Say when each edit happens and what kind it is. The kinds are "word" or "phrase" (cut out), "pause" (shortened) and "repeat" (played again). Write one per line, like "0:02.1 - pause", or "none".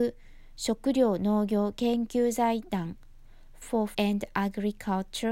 0:03.6 - word
0:03.9 - word